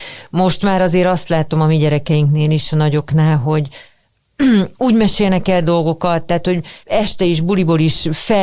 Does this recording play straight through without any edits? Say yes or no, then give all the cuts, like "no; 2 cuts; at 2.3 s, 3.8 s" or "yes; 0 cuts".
no; 2 cuts; at 4.7 s, 6.8 s